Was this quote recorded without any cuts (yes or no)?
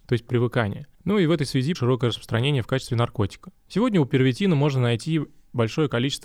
no